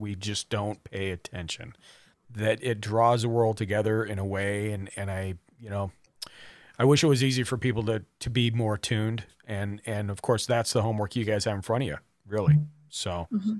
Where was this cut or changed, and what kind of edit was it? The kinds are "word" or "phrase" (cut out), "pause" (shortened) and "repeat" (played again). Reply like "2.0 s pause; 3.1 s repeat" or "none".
none